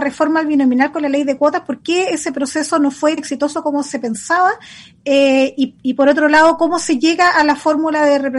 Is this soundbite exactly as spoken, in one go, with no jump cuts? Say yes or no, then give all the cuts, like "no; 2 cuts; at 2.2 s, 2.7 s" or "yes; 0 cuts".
no; 1 cut; at 3.2 s